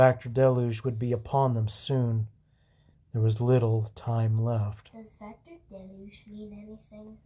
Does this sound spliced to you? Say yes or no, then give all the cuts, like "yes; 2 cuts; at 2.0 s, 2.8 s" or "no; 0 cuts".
no; 0 cuts